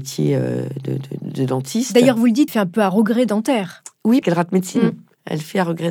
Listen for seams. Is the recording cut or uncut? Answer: cut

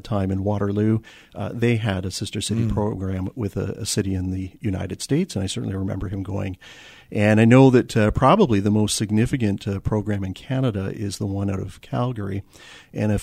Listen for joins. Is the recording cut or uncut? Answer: uncut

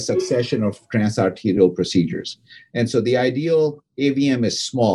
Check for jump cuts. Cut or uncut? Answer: uncut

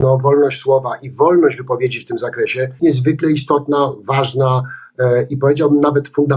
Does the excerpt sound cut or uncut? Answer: cut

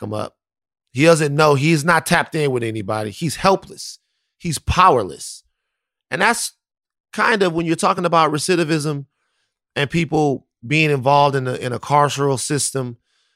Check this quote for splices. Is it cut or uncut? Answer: uncut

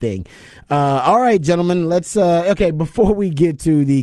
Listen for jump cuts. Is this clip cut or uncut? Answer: uncut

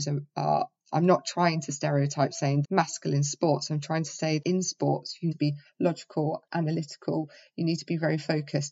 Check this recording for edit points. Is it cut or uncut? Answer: cut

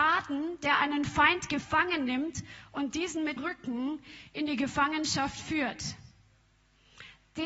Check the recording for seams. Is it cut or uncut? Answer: cut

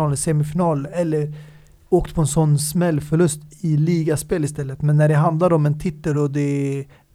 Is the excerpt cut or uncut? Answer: uncut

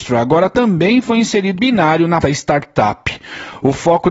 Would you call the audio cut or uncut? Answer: cut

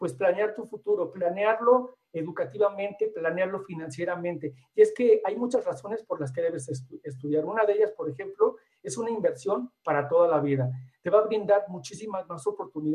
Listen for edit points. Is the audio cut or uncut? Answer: uncut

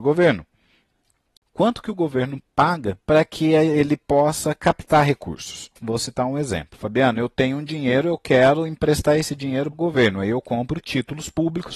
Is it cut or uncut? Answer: cut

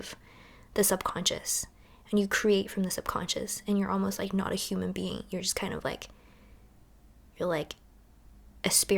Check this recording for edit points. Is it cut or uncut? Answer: uncut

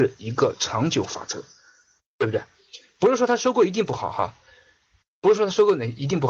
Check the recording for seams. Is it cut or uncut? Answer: uncut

